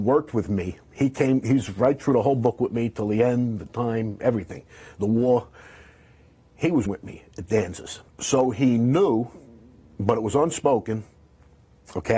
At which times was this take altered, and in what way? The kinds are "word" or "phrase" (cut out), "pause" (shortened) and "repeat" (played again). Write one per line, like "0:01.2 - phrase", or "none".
0:03.7 - word
0:06.9 - word
0:08.1 - pause